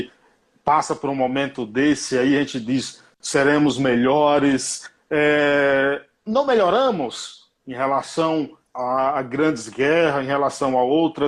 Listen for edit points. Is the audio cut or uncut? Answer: cut